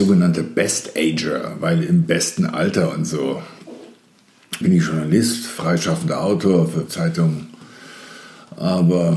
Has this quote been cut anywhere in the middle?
yes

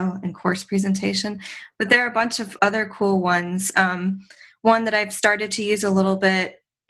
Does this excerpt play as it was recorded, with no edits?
yes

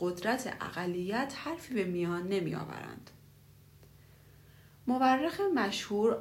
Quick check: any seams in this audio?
no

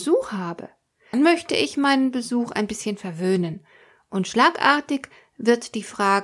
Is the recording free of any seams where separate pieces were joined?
no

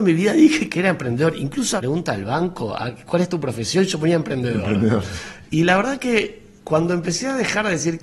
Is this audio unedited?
no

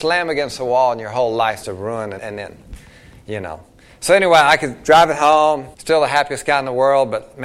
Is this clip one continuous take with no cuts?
no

